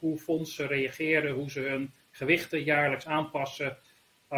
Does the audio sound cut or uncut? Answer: uncut